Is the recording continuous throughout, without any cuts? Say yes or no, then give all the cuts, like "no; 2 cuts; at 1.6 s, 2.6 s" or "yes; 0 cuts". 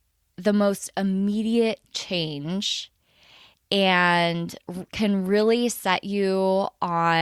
yes; 0 cuts